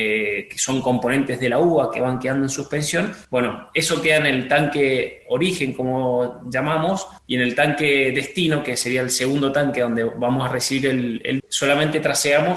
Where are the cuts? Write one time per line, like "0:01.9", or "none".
0:03.2
0:07.2
0:11.4